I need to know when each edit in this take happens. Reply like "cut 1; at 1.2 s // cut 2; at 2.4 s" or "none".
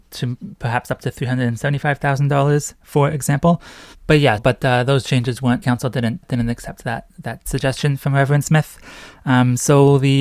cut 1; at 4.4 s // cut 2; at 5.6 s // cut 3; at 6.2 s